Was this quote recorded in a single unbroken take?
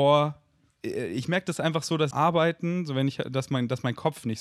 no; 1 cut; at 2.1 s

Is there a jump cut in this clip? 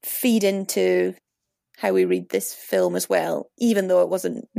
no; 0 cuts

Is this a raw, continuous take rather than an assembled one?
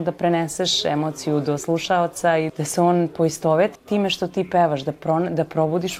no; 2 cuts; at 2.5 s, 3.8 s

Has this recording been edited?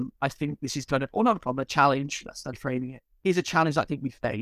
yes; 1 cut; at 2.5 s

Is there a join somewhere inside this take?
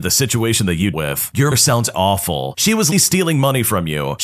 yes; 4 cuts; at 0.9 s, 1.5 s, 1.9 s, 2.9 s

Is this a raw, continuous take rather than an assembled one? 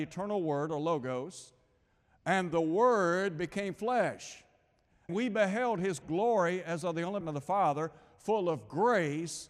no; 3 cuts; at 5.1 s, 6.0 s, 7.2 s

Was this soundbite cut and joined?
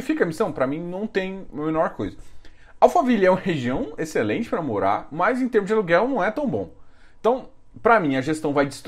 no; 0 cuts

